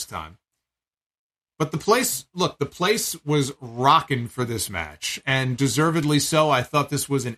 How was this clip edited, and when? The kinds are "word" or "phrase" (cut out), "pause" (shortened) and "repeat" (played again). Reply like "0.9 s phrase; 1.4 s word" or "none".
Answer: none